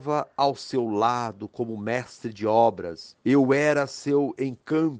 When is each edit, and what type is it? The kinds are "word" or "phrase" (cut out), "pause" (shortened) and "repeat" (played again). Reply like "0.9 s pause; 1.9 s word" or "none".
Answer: 3.2 s pause